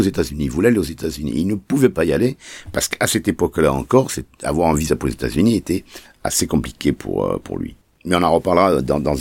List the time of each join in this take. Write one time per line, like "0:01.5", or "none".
none